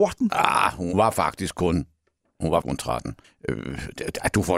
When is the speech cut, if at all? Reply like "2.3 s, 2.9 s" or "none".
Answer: 0.9 s, 2.6 s, 3.2 s